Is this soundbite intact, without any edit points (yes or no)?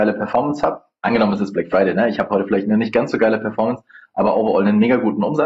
yes